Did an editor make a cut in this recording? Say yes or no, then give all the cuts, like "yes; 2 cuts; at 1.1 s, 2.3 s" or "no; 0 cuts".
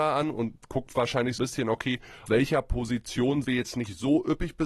yes; 3 cuts; at 1.4 s, 2.3 s, 3.4 s